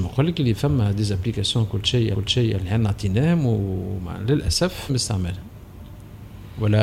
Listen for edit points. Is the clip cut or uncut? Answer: cut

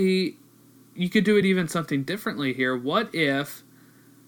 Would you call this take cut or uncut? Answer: uncut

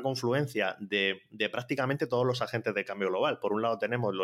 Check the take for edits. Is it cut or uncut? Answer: uncut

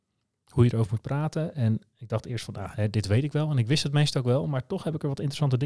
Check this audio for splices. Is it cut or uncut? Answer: uncut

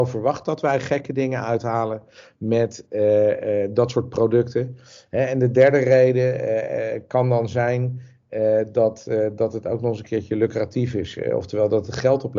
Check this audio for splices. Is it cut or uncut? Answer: uncut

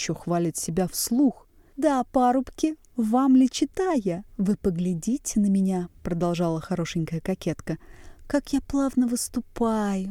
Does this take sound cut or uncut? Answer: cut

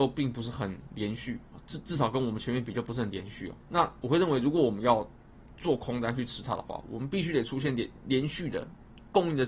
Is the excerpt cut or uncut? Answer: cut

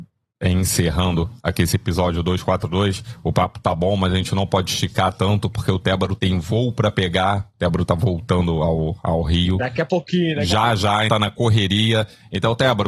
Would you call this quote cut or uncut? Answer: cut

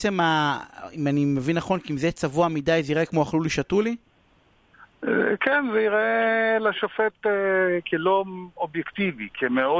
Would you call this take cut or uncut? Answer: uncut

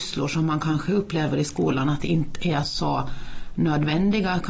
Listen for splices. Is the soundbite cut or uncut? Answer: uncut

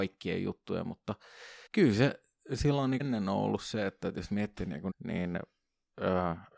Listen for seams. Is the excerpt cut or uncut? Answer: cut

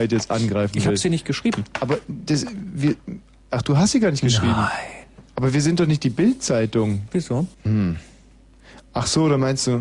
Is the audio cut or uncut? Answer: cut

